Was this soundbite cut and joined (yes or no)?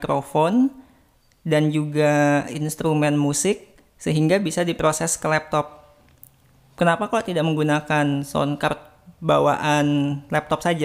no